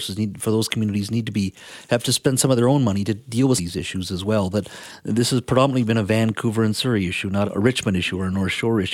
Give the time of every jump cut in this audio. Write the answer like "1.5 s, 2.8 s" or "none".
3.6 s, 7.4 s